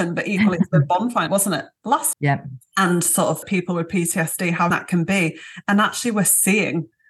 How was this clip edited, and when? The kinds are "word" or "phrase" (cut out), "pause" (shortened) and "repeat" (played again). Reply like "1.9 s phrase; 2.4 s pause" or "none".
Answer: 1.3 s word; 2.1 s word; 3.4 s word; 4.7 s word